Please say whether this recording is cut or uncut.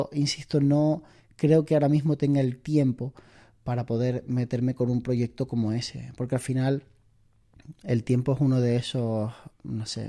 uncut